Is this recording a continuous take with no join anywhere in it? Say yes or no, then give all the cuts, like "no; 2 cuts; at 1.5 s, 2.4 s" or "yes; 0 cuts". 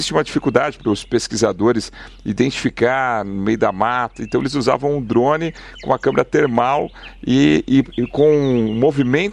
yes; 0 cuts